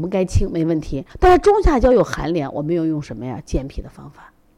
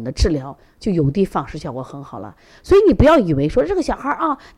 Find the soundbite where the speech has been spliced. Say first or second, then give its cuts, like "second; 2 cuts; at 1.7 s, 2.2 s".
first; 1 cut; at 1.1 s